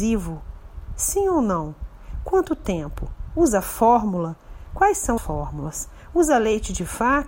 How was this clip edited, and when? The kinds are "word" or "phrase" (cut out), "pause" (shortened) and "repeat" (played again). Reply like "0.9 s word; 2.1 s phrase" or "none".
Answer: 5.2 s word